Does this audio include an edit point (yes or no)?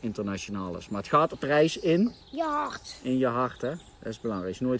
yes